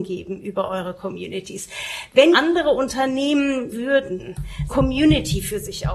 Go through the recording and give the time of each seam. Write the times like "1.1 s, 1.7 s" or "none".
2.3 s, 3.7 s, 4.7 s